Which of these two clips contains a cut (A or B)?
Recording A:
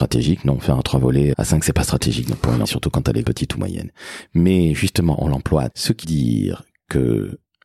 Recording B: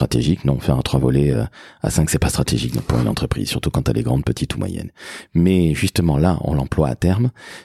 A